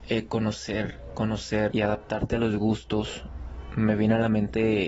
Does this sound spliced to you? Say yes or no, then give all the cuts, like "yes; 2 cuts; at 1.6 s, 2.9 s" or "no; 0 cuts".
yes; 1 cut; at 1.7 s